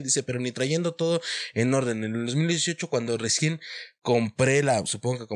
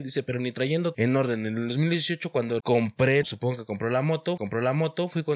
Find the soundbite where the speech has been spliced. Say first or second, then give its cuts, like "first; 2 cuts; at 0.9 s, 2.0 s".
second; 4 cuts; at 0.9 s, 2.6 s, 3.2 s, 4.4 s